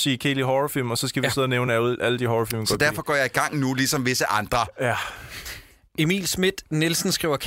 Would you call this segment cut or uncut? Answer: uncut